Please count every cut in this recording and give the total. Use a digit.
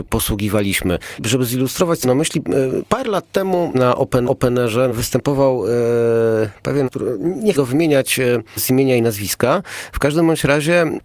4